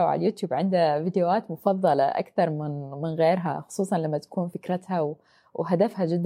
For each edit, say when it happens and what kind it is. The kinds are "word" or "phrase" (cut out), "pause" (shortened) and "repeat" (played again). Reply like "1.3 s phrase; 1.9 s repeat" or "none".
none

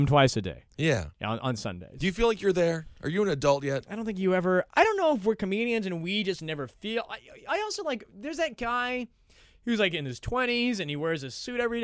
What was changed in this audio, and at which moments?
none

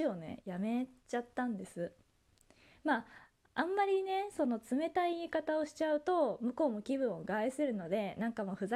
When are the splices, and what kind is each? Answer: none

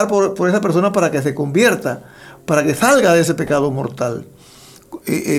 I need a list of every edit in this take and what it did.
none

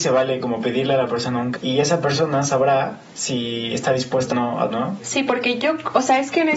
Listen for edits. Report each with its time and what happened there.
1.5 s word; 3.1 s pause; 4.3 s word; 4.7 s word

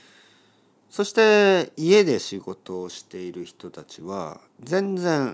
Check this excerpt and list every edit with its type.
none

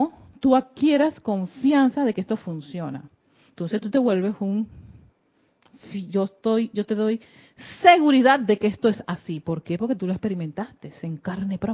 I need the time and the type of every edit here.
none

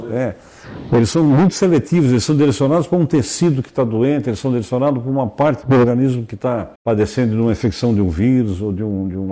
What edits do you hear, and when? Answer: 6.8 s pause

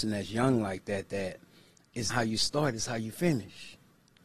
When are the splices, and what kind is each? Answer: 2.1 s word

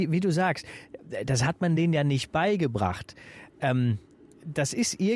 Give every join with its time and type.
none

